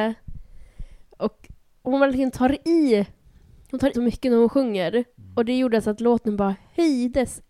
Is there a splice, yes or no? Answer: yes